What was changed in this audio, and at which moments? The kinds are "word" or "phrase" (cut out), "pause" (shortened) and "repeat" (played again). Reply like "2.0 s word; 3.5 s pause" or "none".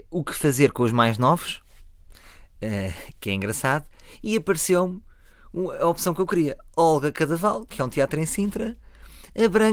none